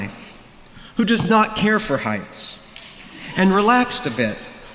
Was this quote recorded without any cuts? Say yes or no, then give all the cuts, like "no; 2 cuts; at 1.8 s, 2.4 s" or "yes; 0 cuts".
yes; 0 cuts